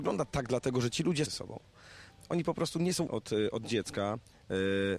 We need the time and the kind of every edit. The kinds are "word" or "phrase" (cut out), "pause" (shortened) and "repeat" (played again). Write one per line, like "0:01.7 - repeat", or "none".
0:01.3 - phrase
0:03.1 - word